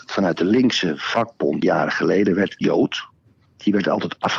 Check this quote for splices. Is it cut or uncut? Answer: cut